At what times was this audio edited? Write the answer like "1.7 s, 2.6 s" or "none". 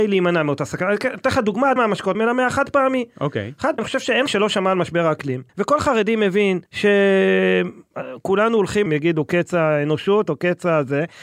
1.8 s, 2.1 s, 3.8 s, 4.3 s, 5.5 s, 6.7 s, 8.9 s